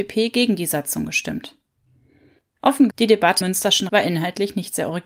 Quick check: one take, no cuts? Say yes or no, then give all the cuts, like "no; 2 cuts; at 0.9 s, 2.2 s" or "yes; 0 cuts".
no; 3 cuts; at 2.9 s, 3.4 s, 3.9 s